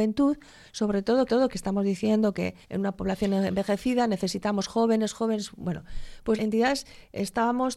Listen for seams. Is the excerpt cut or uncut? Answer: cut